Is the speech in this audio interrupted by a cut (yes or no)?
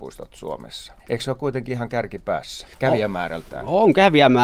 yes